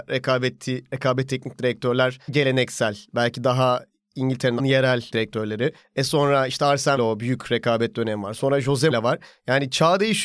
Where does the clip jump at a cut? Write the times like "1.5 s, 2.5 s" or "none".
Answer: 1.3 s, 2.3 s, 4.6 s, 5.1 s, 7.0 s, 8.9 s